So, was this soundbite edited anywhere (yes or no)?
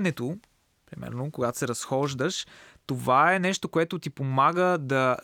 no